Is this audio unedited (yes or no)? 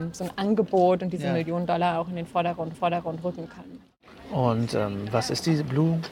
no